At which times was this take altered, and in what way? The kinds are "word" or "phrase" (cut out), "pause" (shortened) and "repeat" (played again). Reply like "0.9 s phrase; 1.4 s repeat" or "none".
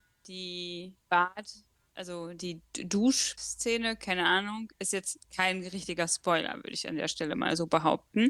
1.0 s pause; 3.4 s word; 5.2 s pause

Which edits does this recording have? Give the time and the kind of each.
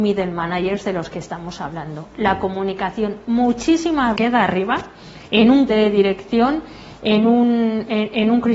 4.2 s phrase; 5.7 s word

